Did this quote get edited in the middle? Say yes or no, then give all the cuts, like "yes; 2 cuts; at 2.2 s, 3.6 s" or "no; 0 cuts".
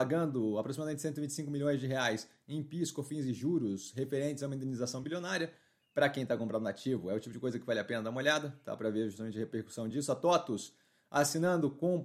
no; 0 cuts